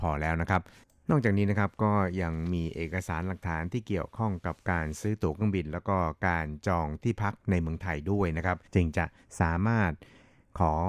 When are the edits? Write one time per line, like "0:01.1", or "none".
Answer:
0:08.7